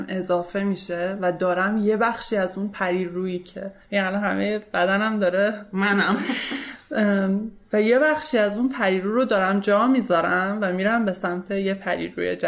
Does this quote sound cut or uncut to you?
uncut